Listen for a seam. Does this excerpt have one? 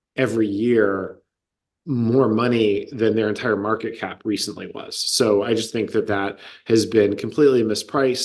no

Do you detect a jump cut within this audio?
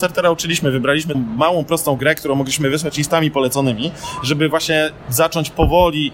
yes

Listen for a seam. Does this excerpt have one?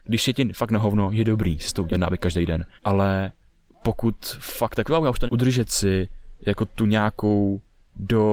yes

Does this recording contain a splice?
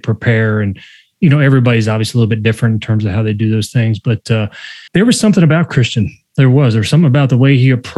yes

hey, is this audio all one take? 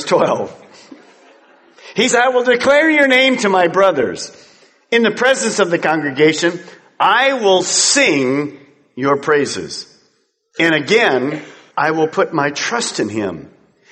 no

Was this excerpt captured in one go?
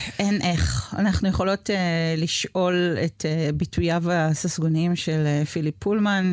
yes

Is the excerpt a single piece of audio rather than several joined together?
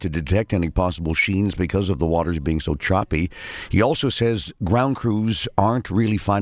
yes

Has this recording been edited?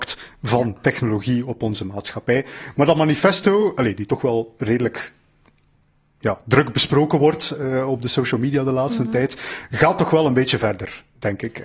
no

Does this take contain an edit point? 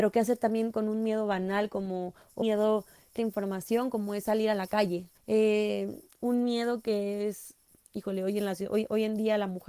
yes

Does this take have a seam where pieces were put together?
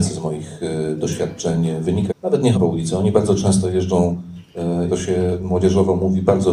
yes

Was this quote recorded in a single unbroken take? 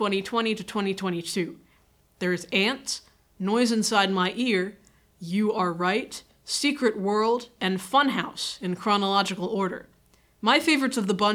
yes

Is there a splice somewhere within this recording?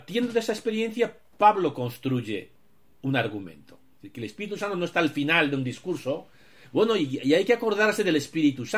no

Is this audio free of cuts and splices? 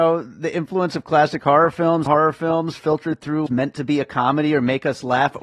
no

